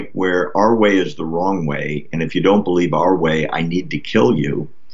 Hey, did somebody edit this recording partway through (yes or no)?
no